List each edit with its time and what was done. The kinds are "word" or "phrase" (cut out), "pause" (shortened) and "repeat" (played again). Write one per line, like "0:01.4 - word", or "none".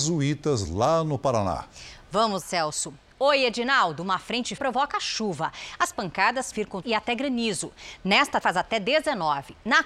0:02.4 - word
0:04.6 - word
0:05.9 - word
0:06.5 - word
0:06.8 - word
0:08.4 - word